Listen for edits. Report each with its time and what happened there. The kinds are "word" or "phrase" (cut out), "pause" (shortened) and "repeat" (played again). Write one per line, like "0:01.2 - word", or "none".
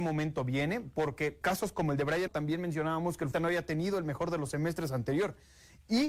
0:01.4 - word
0:02.3 - word
0:03.3 - word